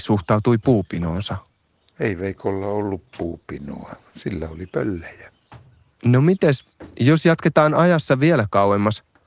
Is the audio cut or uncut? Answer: uncut